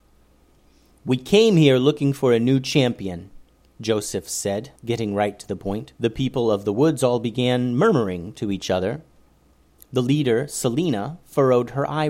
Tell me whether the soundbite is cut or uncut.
cut